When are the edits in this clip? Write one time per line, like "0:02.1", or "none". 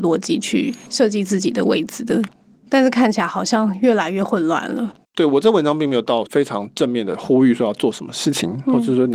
0:05.0